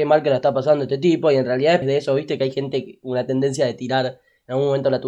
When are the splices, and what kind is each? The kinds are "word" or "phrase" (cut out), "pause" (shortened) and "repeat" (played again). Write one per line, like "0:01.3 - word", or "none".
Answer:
0:01.8 - word